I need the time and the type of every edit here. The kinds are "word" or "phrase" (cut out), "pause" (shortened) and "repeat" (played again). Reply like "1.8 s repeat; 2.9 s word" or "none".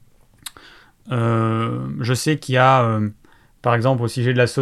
none